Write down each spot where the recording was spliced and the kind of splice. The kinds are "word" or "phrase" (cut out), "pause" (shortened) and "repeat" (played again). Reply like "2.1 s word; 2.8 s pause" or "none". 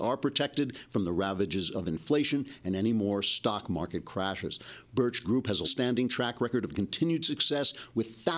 5.2 s word; 5.6 s word